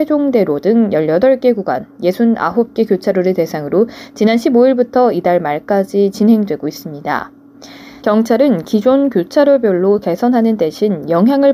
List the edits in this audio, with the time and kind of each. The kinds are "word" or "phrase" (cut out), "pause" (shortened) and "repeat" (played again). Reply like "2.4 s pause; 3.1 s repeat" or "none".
none